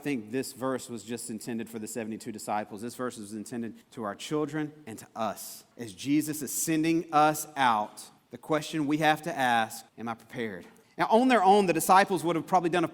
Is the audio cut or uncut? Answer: cut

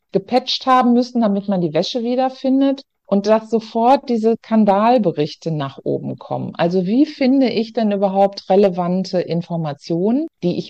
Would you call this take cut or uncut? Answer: uncut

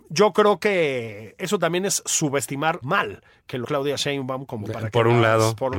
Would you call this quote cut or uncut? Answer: cut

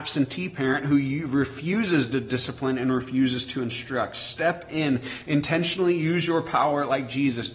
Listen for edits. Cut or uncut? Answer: uncut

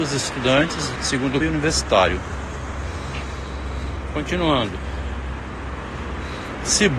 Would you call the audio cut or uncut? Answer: cut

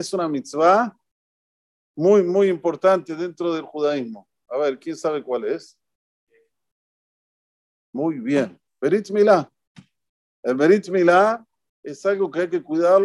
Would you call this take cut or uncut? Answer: uncut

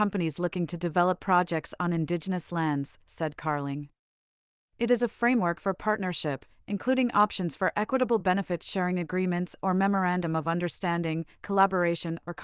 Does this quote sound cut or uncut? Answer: uncut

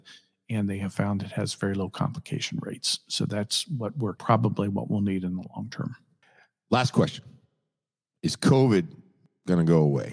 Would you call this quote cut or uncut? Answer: cut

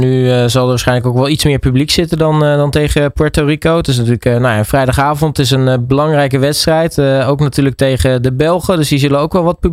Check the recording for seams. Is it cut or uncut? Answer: uncut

